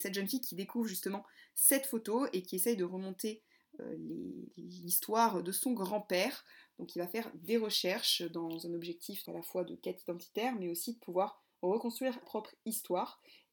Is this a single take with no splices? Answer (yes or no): no